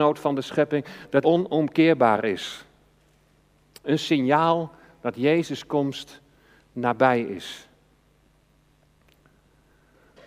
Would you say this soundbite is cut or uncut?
cut